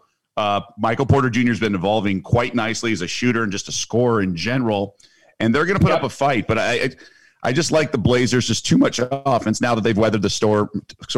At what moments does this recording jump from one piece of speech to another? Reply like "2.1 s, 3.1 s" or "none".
none